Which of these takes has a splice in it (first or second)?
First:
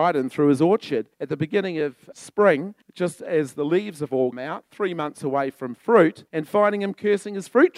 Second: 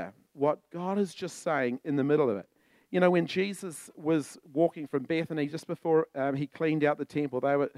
first